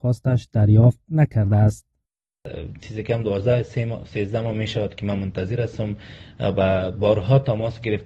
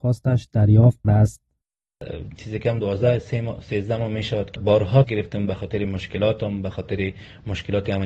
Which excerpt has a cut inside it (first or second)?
second